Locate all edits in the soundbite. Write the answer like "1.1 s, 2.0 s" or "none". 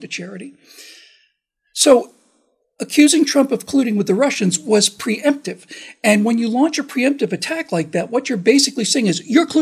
none